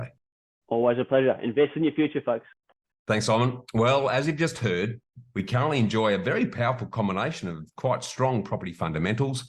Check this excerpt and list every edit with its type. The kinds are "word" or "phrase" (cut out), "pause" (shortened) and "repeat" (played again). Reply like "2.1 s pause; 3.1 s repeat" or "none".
none